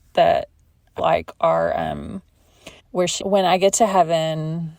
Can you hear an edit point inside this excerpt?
yes; 3 cuts; at 1.0 s, 2.8 s, 3.2 s

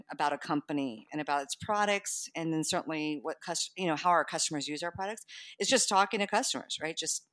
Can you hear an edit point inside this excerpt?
no; 0 cuts

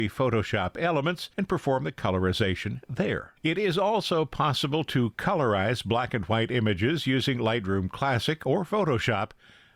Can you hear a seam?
yes; 2 cuts; at 1.3 s, 3.4 s

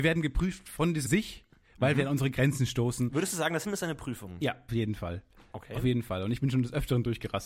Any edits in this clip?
yes; 3 cuts; at 1.1 s, 3.6 s, 4.7 s

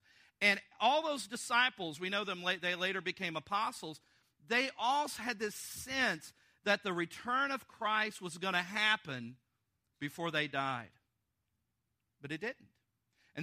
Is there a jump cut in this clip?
no; 0 cuts

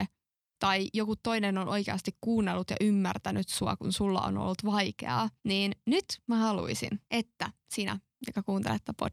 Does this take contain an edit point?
yes; 2 cuts; at 5.4 s, 7.1 s

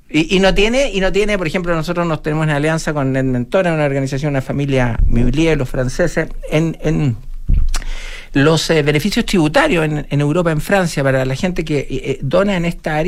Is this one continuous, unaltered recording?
yes; 0 cuts

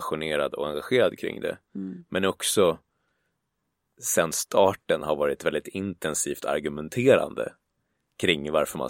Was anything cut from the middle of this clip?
no; 0 cuts

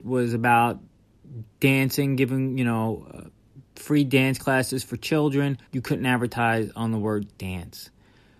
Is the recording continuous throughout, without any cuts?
no; 2 cuts; at 3.7 s, 5.7 s

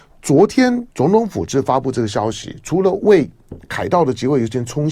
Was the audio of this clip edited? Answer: yes; 1 cut; at 0.9 s

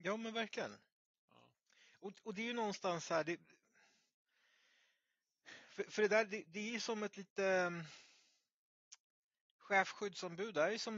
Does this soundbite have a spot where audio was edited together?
no; 0 cuts

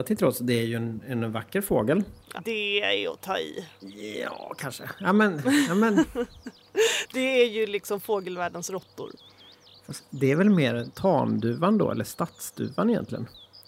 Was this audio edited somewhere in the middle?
yes; 1 cut; at 2.4 s

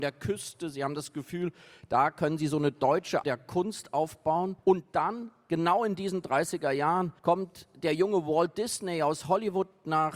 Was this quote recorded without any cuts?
no; 3 cuts; at 3.2 s, 4.6 s, 7.2 s

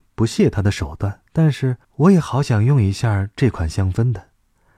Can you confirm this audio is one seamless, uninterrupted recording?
no; 2 cuts; at 1.3 s, 1.8 s

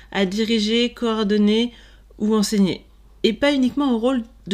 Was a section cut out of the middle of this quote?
no; 0 cuts

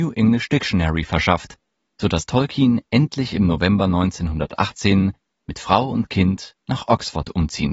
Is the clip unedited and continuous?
yes; 0 cuts

